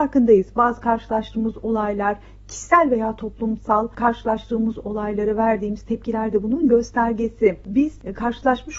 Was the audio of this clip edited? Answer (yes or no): no